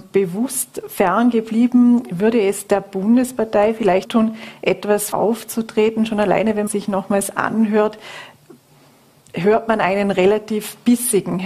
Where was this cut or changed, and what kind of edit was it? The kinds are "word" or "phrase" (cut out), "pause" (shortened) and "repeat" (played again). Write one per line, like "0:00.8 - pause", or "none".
0:04.0 - phrase
0:05.1 - word
0:06.7 - phrase